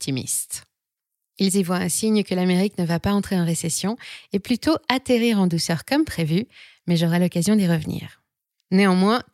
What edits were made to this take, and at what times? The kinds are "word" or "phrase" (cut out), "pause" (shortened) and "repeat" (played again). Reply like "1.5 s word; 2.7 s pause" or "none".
none